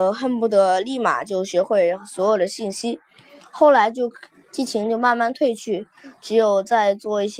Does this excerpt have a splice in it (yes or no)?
no